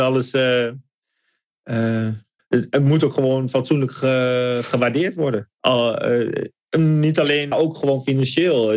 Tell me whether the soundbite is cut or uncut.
cut